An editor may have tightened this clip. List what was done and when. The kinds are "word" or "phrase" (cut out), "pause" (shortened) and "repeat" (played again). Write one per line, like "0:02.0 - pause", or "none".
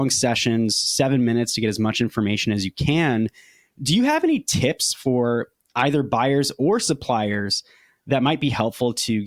none